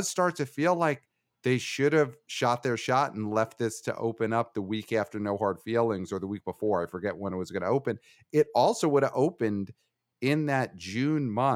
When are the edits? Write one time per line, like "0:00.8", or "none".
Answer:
none